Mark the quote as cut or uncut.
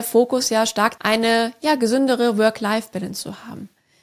cut